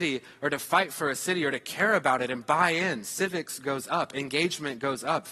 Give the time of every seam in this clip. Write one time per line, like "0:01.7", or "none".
none